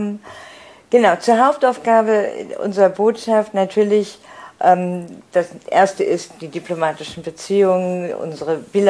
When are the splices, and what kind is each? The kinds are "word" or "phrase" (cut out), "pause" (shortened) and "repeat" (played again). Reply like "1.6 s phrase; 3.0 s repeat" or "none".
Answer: none